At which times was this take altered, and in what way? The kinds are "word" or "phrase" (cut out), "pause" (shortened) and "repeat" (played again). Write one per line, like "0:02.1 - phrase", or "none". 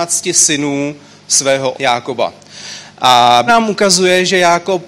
0:01.7 - word
0:03.5 - word